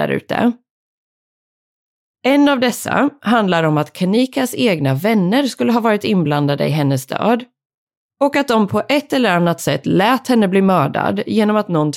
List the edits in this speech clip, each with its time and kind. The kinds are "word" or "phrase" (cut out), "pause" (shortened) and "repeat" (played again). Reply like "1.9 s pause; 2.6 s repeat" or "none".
none